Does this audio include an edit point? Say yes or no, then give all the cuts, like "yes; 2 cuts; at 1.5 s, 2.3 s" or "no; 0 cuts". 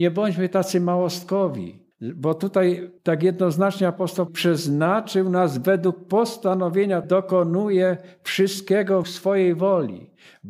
yes; 5 cuts; at 1.9 s, 3.0 s, 4.3 s, 7.0 s, 9.0 s